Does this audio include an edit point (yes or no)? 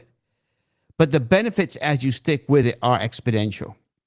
no